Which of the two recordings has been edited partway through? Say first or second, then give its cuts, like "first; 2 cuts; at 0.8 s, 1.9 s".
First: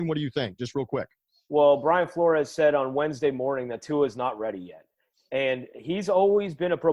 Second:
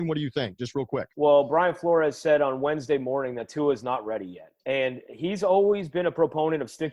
second; 2 cuts; at 1.1 s, 4.6 s